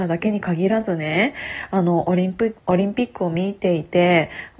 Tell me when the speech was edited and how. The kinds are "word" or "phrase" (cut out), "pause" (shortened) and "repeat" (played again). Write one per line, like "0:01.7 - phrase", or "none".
0:02.6 - pause